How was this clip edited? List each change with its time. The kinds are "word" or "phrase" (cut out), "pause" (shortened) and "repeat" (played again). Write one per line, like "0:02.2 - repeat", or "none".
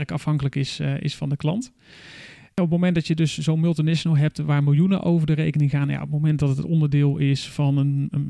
none

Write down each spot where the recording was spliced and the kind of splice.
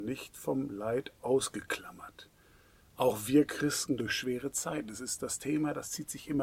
0:04.0 - word

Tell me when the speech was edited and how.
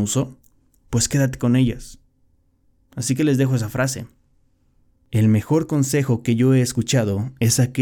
none

